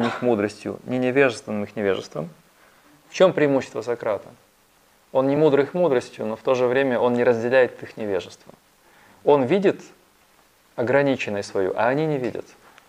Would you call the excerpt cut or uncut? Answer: uncut